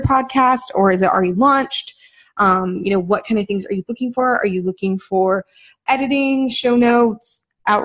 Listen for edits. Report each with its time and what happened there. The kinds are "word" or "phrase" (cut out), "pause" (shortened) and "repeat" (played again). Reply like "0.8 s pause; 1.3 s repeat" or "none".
none